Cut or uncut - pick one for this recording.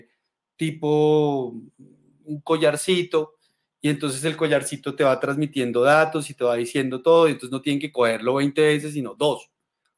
uncut